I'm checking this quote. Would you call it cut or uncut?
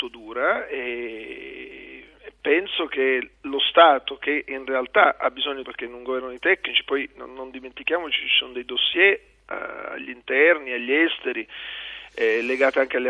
cut